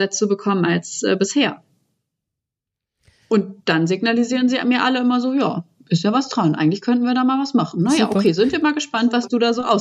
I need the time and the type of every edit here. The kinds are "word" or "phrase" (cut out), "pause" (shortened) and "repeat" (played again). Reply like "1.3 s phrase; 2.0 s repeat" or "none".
none

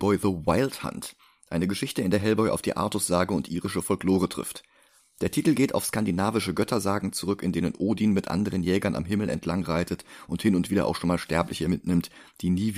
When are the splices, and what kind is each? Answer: none

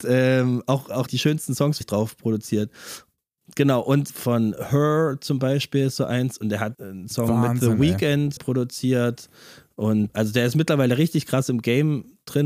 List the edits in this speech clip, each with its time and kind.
1.1 s word; 1.8 s word; 4.1 s word; 6.7 s word; 8.4 s word; 10.1 s word

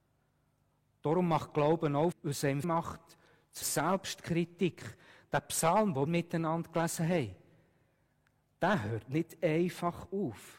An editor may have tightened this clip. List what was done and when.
2.1 s word; 2.6 s word; 3.6 s word; 6.1 s word

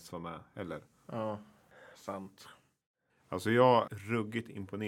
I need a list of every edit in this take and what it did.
3.9 s word

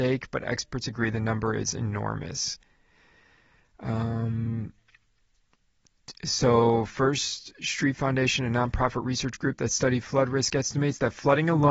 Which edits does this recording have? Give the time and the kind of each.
none

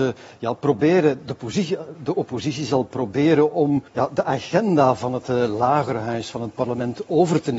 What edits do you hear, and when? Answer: 3.9 s pause

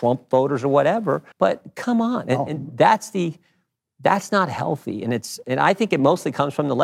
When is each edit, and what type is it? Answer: 1.3 s pause

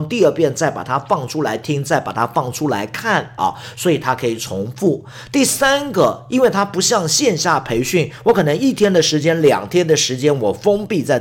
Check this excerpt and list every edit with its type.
3.4 s phrase

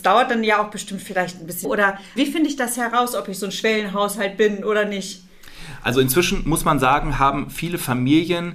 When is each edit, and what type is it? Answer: 1.6 s word; 2.2 s word

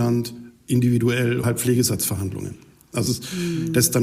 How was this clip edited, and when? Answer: 1.4 s word; 3.1 s word

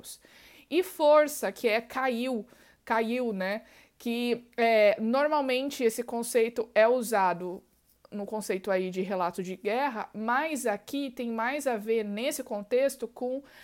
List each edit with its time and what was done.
none

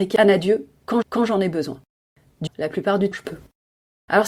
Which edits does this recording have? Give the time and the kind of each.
1.0 s repeat; 2.5 s word; 3.1 s word

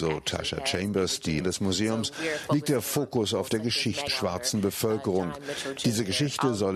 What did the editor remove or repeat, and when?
1.4 s word; 4.1 s word

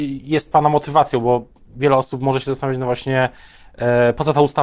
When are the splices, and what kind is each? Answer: none

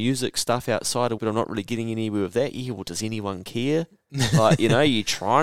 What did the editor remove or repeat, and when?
1.2 s word

